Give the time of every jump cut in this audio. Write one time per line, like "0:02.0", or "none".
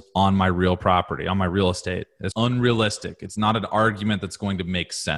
0:02.3